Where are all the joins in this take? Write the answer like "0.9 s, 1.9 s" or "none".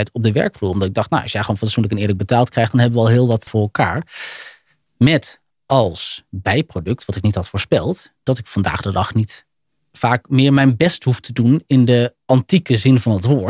3.5 s